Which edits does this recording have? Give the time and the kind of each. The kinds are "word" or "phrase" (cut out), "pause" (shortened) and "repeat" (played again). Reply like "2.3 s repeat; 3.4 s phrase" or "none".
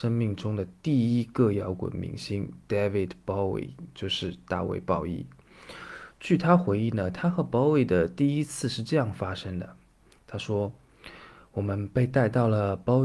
none